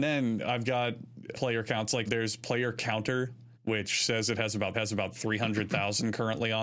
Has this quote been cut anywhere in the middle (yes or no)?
yes